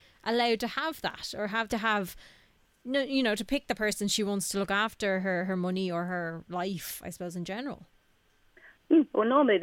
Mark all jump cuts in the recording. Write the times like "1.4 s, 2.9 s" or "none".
1.7 s